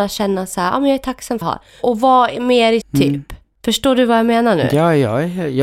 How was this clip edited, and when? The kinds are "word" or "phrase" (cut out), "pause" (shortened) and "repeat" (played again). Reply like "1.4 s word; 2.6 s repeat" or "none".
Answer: 1.4 s phrase; 2.8 s word